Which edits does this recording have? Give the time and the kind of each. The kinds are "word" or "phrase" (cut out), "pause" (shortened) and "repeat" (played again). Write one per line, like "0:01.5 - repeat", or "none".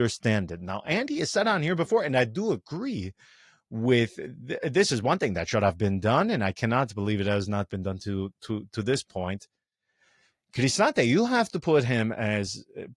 none